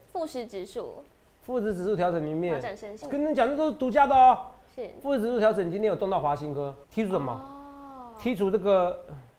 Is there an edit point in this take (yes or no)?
yes